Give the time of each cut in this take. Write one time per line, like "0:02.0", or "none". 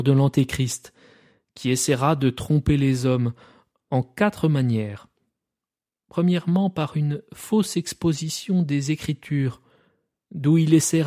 none